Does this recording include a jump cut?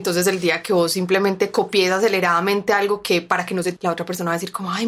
yes; 1 cut; at 3.8 s

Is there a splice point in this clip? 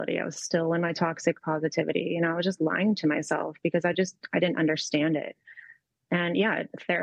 no; 0 cuts

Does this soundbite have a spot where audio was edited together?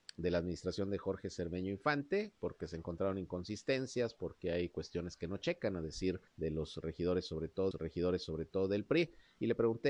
yes; 2 cuts; at 6.3 s, 7.7 s

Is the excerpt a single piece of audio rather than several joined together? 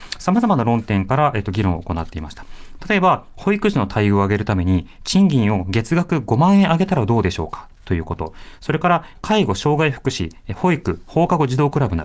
yes; 0 cuts

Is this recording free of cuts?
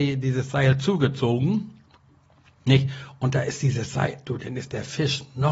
yes; 0 cuts

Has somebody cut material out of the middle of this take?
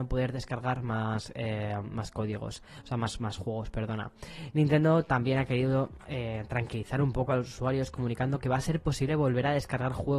no; 0 cuts

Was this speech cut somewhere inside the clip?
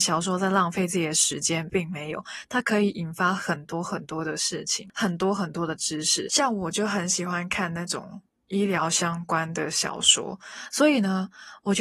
yes; 1 cut; at 1.7 s

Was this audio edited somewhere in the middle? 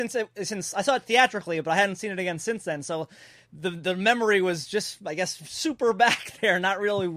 no; 0 cuts

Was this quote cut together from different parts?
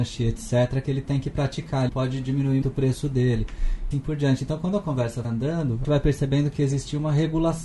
yes; 5 cuts; at 1.9 s, 2.6 s, 3.9 s, 5.2 s, 5.8 s

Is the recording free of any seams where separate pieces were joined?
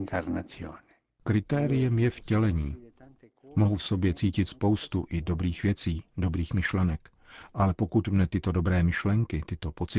yes; 0 cuts

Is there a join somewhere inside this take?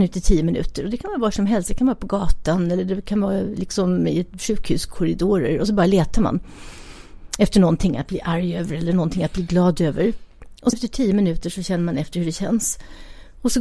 yes; 1 cut; at 10.7 s

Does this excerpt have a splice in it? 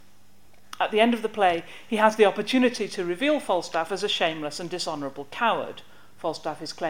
no; 0 cuts

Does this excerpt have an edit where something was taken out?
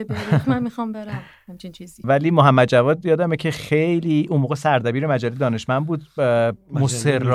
no; 0 cuts

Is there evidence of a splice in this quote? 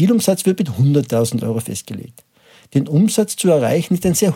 no; 0 cuts

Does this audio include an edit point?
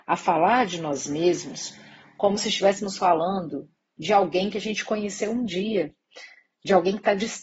no; 0 cuts

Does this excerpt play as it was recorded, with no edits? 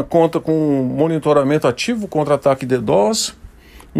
yes; 0 cuts

